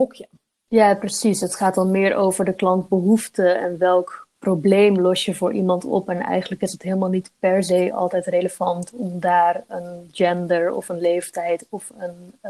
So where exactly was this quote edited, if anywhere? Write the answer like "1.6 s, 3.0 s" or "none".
none